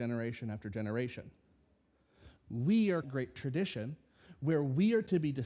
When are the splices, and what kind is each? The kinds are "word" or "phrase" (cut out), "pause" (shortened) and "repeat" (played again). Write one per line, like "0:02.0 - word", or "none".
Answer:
0:03.0 - phrase